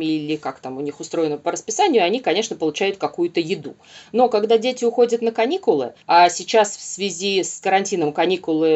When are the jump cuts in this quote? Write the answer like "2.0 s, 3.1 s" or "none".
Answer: 6.0 s